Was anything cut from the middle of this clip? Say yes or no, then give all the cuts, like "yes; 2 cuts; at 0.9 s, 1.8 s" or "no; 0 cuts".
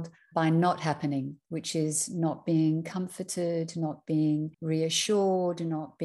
yes; 2 cuts; at 1.4 s, 4.5 s